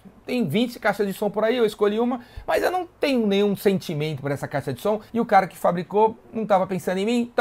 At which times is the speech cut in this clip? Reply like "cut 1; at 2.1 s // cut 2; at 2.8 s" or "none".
cut 1; at 5.1 s